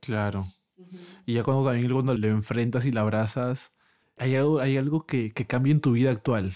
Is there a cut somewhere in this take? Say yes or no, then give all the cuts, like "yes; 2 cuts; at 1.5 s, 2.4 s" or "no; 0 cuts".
yes; 2 cuts; at 2.2 s, 4.0 s